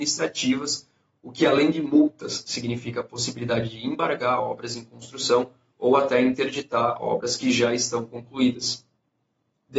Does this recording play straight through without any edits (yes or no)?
yes